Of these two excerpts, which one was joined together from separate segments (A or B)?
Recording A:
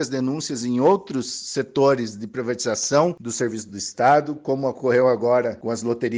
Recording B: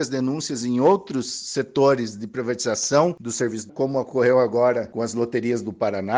B